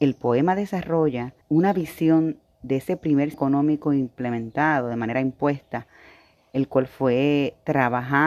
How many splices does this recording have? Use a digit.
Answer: 2